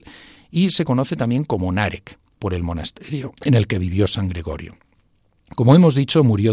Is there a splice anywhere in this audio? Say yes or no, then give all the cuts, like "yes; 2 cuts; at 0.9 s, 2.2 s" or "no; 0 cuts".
yes; 1 cut; at 3.4 s